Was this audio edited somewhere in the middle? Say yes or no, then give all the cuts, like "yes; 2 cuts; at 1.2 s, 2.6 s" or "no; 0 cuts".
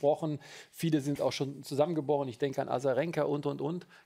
no; 0 cuts